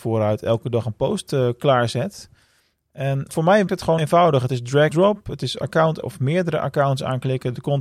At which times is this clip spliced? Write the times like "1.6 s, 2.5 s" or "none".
3.3 s, 3.7 s, 4.0 s, 4.9 s, 6.0 s